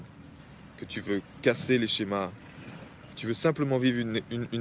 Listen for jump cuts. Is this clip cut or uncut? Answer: uncut